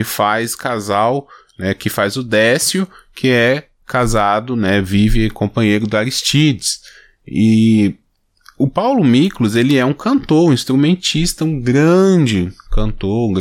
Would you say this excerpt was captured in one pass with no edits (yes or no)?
yes